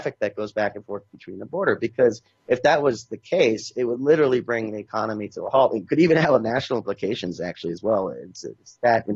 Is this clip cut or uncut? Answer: uncut